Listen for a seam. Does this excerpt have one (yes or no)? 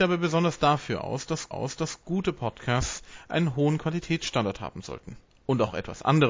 yes